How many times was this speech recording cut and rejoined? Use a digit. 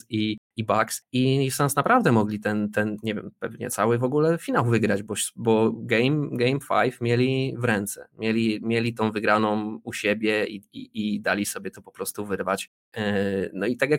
0